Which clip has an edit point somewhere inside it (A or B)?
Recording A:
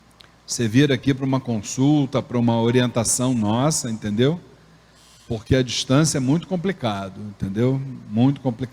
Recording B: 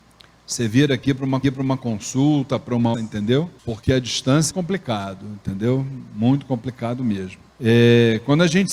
B